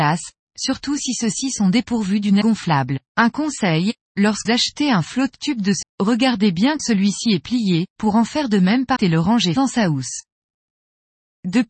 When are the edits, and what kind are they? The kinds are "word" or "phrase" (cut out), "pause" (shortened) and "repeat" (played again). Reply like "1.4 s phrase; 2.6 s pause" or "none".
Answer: 2.4 s word; 3.1 s pause; 4.4 s word; 5.8 s word; 6.8 s word; 7.9 s pause; 9.0 s phrase; 9.6 s word